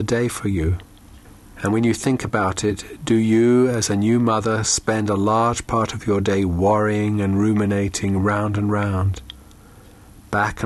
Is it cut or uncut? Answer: uncut